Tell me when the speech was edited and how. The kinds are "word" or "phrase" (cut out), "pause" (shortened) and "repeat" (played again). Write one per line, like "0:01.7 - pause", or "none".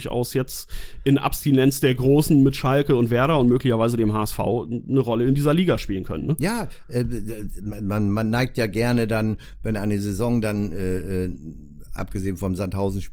none